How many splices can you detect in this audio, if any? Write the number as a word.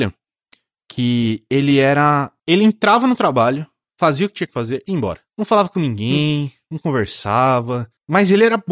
zero